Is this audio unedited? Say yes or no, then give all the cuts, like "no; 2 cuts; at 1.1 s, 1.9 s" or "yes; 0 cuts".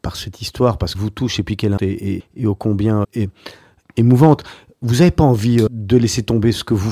no; 5 cuts; at 0.9 s, 1.8 s, 2.2 s, 3.0 s, 5.7 s